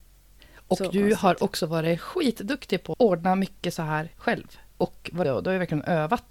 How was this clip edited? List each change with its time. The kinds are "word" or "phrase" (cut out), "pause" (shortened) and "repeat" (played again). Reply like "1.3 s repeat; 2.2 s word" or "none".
2.9 s word; 4.1 s pause; 5.2 s word